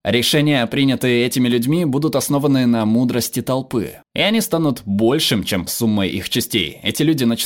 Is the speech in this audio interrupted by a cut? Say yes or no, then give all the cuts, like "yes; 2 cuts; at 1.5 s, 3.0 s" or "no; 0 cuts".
yes; 2 cuts; at 4.0 s, 5.7 s